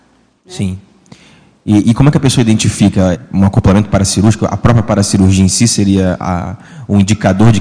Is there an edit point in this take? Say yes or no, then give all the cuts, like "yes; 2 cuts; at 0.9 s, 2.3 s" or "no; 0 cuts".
yes; 1 cut; at 3.1 s